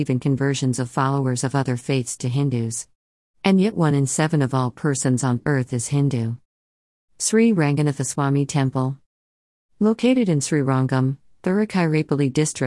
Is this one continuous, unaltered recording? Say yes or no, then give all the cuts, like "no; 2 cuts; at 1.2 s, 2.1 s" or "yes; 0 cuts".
yes; 0 cuts